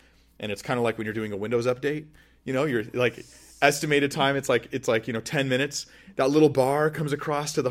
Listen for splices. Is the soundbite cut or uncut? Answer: uncut